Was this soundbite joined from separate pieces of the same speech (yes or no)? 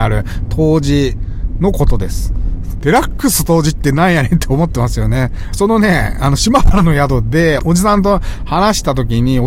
yes